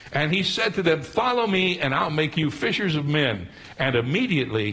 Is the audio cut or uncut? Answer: uncut